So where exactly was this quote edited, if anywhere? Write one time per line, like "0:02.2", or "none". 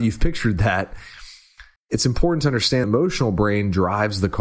0:01.8
0:02.8